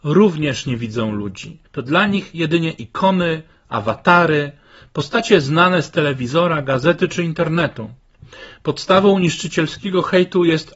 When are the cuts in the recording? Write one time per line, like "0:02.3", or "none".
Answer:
0:01.7